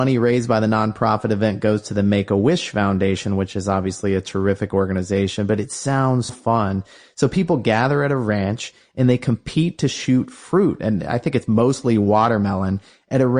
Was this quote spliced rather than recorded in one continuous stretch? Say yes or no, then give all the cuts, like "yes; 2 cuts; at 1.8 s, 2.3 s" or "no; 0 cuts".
yes; 1 cut; at 6.3 s